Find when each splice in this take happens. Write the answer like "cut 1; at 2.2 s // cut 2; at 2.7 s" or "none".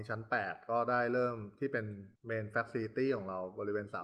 cut 1; at 2.2 s

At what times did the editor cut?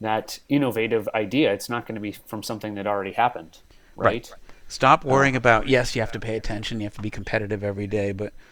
none

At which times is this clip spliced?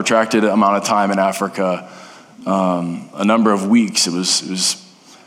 none

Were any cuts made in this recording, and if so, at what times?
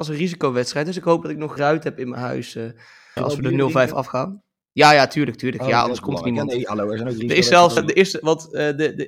cut 1; at 1.6 s // cut 2; at 3.2 s // cut 3; at 7.8 s

